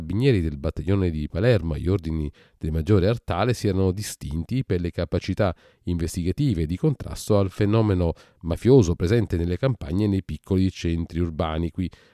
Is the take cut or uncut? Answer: uncut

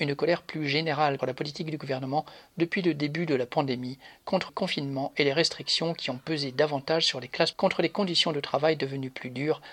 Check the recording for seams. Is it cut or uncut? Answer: cut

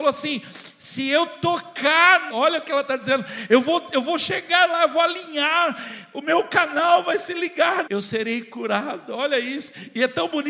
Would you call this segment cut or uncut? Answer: cut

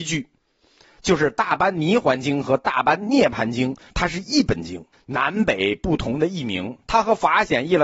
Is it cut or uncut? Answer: cut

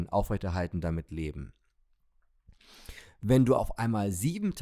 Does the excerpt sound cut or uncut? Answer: cut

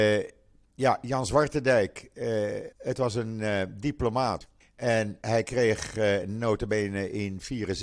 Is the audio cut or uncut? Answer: cut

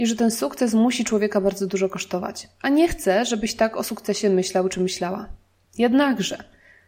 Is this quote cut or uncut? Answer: uncut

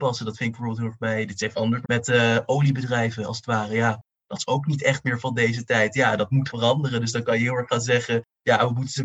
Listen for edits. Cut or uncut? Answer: cut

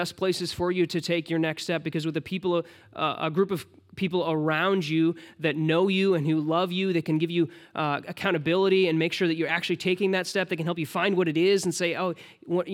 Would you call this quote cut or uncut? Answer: uncut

